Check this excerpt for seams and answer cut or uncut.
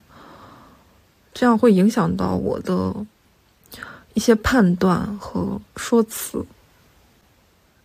uncut